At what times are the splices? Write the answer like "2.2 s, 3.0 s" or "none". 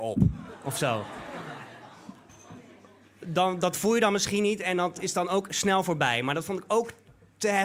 none